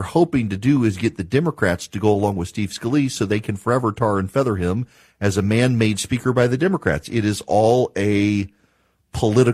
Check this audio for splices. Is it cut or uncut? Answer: uncut